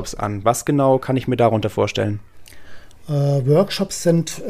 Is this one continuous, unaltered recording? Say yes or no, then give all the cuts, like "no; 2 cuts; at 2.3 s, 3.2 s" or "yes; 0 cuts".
yes; 0 cuts